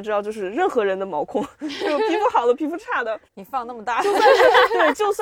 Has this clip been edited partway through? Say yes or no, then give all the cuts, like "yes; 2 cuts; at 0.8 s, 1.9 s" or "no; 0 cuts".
yes; 1 cut; at 3.2 s